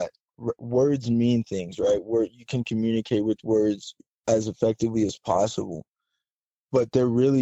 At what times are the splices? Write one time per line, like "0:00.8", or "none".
none

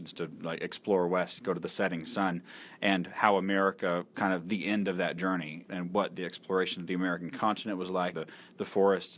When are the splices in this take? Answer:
0:04.1
0:05.6
0:08.1

